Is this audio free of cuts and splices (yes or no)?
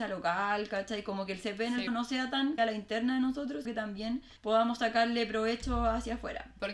no